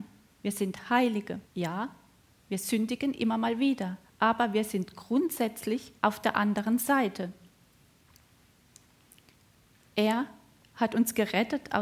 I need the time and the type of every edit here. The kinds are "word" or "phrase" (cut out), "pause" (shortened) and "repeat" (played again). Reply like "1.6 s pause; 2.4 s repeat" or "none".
1.4 s pause; 4.0 s pause; 6.0 s pause